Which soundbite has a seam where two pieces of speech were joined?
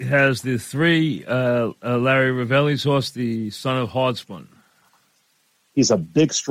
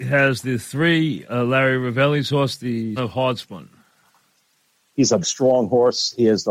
second; 3 cuts; at 1.2 s, 3.0 s, 5.2 s

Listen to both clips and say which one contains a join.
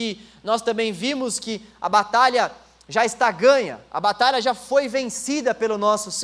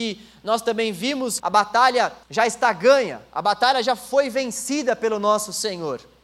second; 2 cuts; at 1.4 s, 2.2 s

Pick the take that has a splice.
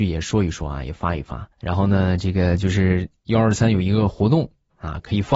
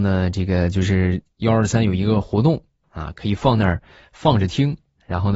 first; 1 cut; at 1.5 s

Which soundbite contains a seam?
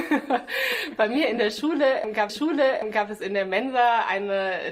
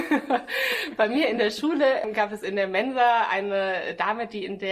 first; 1 cut; at 2.3 s

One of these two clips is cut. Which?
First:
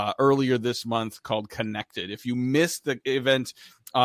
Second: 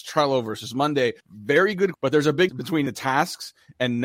second; 4 cuts; at 1.2 s, 1.9 s, 2.5 s, 2.9 s

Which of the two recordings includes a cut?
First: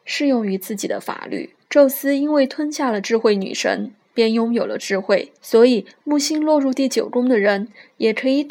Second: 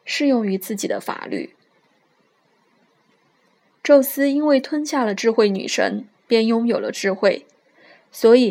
first; 2 cuts; at 1.6 s, 5.4 s

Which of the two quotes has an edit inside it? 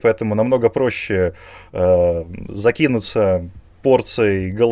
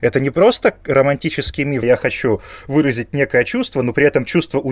second; 1 cut; at 1.8 s

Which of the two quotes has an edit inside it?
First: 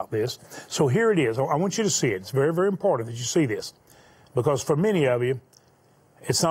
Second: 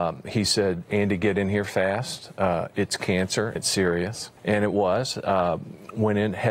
second; 2 cuts; at 3.6 s, 4.4 s

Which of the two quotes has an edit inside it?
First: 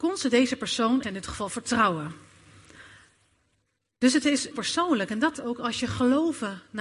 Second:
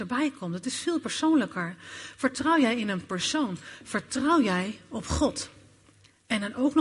first; 3 cuts; at 1.0 s, 4.5 s, 5.4 s

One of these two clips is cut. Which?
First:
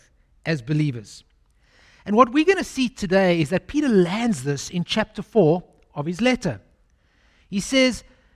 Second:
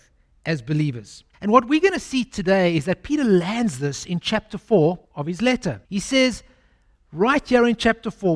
second; 3 cuts; at 1.3 s, 5.0 s, 5.8 s

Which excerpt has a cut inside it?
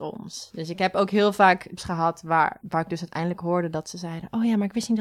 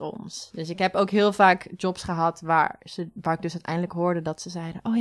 first; 2 cuts; at 1.8 s, 2.6 s

